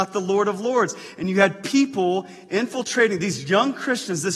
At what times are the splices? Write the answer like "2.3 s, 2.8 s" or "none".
none